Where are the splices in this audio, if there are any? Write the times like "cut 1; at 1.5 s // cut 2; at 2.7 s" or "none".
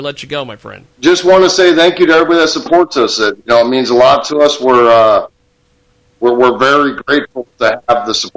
cut 1; at 0.9 s

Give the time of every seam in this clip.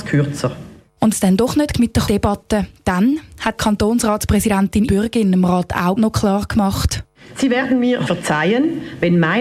cut 1; at 1.1 s // cut 2; at 1.7 s // cut 3; at 2.1 s // cut 4; at 3.6 s // cut 5; at 4.9 s // cut 6; at 6.0 s // cut 7; at 8.1 s

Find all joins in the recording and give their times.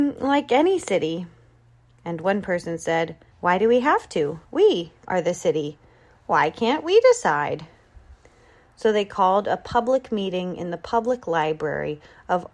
cut 1; at 3.3 s // cut 2; at 4.4 s // cut 3; at 5.0 s

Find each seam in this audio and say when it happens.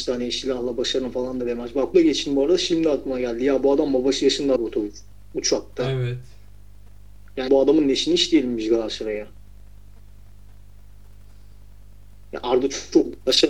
cut 1; at 1.9 s // cut 2; at 4.6 s // cut 3; at 7.5 s

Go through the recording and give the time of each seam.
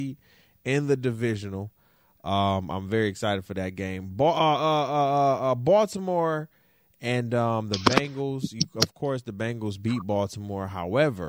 none

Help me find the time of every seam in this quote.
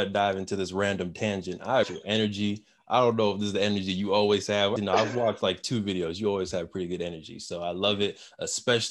cut 1; at 1.8 s // cut 2; at 4.8 s

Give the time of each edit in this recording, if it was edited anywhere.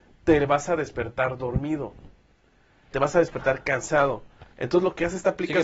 cut 1; at 2.9 s // cut 2; at 4.5 s

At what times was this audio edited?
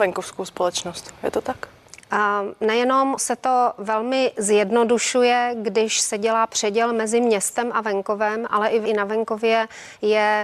cut 1; at 3.2 s // cut 2; at 8.9 s

